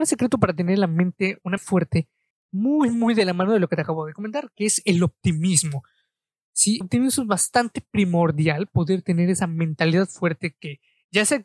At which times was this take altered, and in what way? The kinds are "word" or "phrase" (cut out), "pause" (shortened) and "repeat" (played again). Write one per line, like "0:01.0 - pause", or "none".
0:01.6 - word
0:02.3 - word
0:06.8 - word
0:08.7 - word